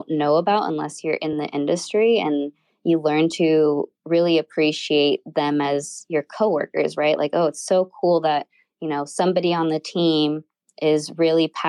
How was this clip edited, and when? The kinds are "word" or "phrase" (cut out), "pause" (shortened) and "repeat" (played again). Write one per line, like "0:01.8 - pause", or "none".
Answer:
none

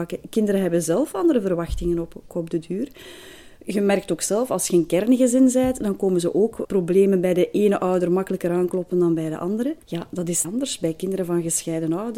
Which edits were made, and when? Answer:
0:02.3 - word
0:06.6 - word
0:09.8 - pause
0:10.4 - word

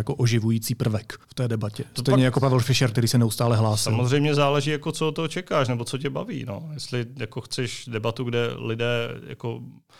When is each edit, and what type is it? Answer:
0:01.2 - pause

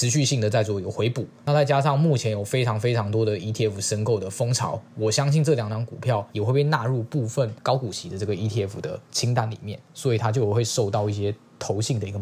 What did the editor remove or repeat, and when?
0:06.3 - pause
0:09.8 - pause

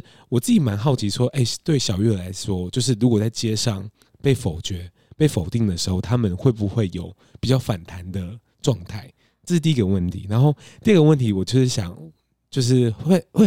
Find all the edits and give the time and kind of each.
none

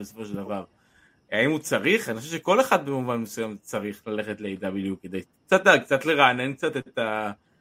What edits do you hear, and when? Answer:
none

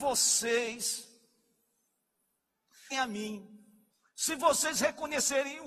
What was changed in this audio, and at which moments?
0:02.9 - word
0:03.9 - pause

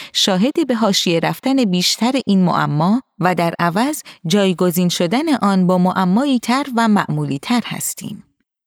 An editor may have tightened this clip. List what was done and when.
0:06.4 - word

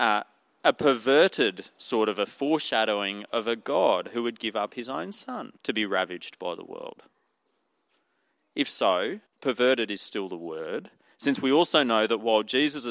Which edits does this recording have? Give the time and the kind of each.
0:05.6 - pause
0:09.3 - pause

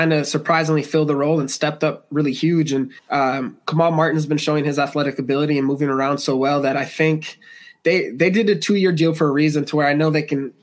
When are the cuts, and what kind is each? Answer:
0:03.0 - pause

